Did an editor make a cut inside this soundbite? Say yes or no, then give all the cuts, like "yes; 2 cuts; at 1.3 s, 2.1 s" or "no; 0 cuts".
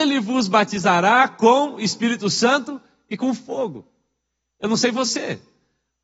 no; 0 cuts